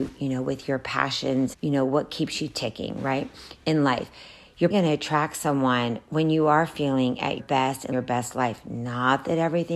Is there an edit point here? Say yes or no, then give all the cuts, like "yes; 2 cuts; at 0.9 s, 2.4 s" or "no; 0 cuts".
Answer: yes; 4 cuts; at 1.5 s, 4.7 s, 7.4 s, 7.9 s